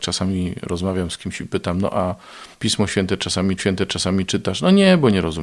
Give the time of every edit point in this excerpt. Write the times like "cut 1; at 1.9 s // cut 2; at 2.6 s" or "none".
cut 1; at 2.5 s // cut 2; at 3.6 s